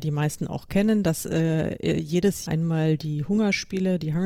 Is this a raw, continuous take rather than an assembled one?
no; 1 cut; at 2.5 s

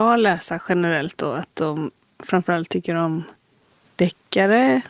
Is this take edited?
no; 0 cuts

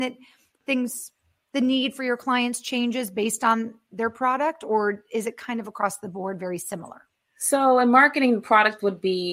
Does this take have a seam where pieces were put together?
no; 0 cuts

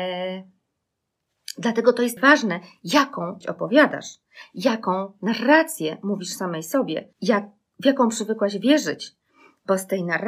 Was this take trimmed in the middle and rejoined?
yes; 3 cuts; at 2.2 s, 3.4 s, 7.1 s

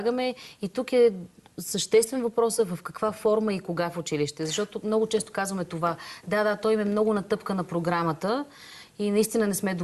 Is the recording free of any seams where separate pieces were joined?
yes; 0 cuts

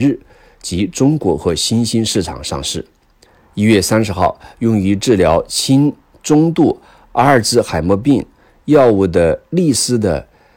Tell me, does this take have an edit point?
no; 0 cuts

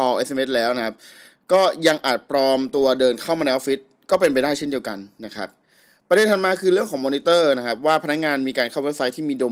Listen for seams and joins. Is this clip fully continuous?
yes; 0 cuts

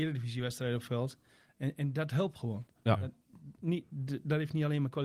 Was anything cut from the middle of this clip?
no; 0 cuts

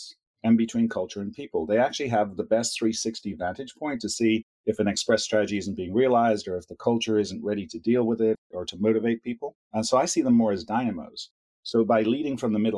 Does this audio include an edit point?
yes; 1 cut; at 9.6 s

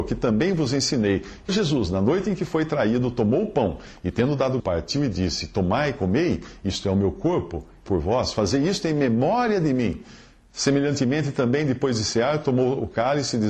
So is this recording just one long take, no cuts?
no; 3 cuts; at 1.5 s, 4.6 s, 7.9 s

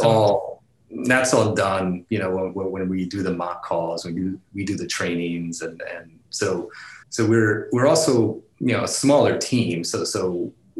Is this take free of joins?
no; 1 cut; at 7.0 s

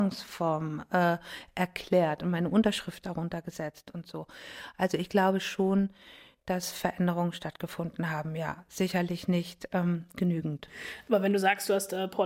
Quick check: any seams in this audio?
no; 0 cuts

